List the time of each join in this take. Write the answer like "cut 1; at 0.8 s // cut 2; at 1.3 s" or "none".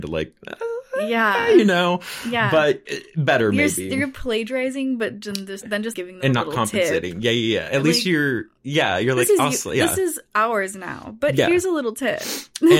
cut 1; at 2.9 s // cut 2; at 5.6 s // cut 3; at 5.9 s